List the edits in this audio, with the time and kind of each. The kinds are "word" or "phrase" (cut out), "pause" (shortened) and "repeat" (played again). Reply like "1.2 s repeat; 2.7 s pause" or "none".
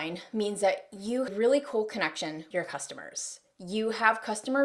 1.3 s phrase; 2.5 s word